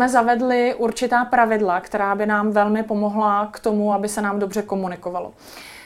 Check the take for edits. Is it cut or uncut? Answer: uncut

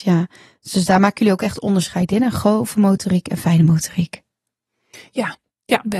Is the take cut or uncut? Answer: uncut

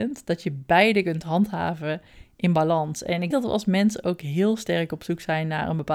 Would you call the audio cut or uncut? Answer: cut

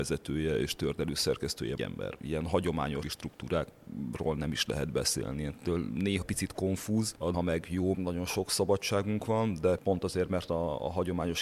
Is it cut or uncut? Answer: cut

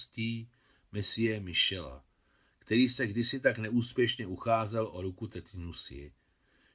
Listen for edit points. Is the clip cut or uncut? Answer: uncut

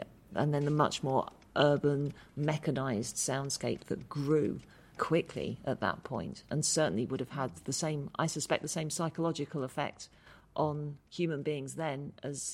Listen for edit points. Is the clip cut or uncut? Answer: cut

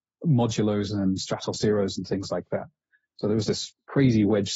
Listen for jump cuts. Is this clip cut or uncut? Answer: uncut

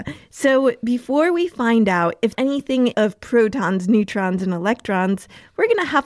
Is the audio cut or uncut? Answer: cut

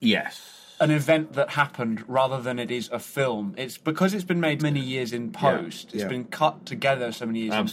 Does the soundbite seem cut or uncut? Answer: cut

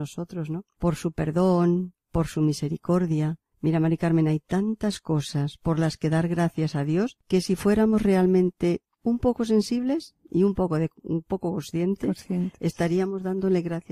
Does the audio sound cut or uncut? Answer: uncut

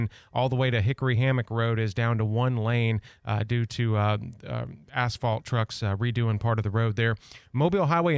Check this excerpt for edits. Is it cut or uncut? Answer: uncut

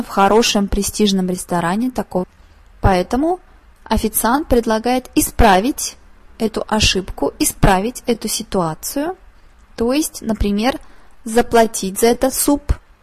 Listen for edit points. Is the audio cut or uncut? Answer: cut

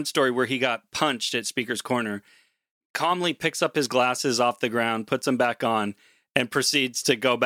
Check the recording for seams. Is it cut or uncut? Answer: uncut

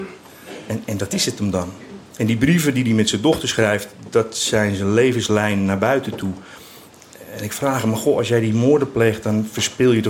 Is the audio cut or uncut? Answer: cut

